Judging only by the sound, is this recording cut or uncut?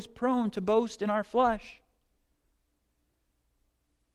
uncut